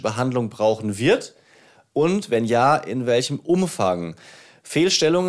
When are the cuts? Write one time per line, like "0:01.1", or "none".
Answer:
none